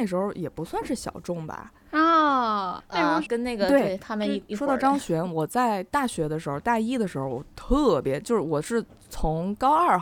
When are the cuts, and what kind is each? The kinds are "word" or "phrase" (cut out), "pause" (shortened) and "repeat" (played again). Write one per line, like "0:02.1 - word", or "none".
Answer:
0:02.8 - word
0:03.3 - phrase